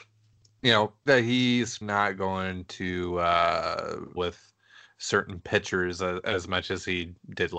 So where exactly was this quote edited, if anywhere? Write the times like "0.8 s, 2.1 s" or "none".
1.1 s, 1.8 s, 4.2 s